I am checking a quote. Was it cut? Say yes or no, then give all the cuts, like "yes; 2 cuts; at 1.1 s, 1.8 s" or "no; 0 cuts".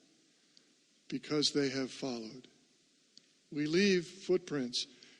no; 0 cuts